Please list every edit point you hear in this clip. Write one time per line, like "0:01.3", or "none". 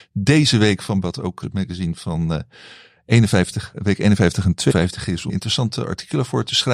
0:01.0
0:01.4
0:03.7
0:04.7
0:05.3